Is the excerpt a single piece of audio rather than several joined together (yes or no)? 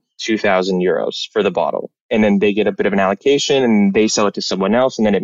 yes